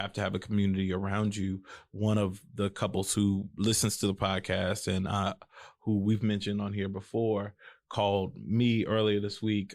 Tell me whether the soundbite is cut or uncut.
uncut